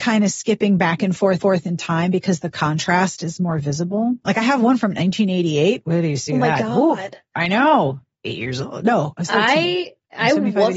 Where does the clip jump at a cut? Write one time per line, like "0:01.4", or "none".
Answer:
0:01.4